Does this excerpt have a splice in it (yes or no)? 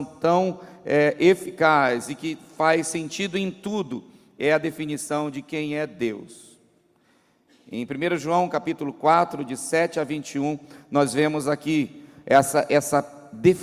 no